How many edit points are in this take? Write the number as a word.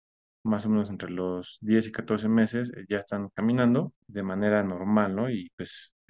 one